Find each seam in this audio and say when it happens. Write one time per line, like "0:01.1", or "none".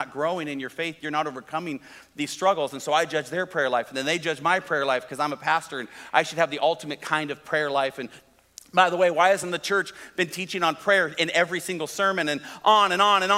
none